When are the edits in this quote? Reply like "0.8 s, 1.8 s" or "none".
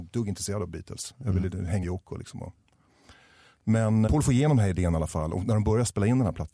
1.8 s, 4.1 s